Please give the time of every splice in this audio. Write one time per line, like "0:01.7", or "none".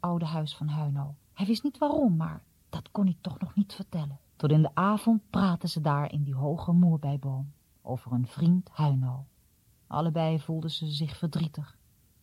0:01.2
0:02.5
0:04.3
0:07.6
0:09.5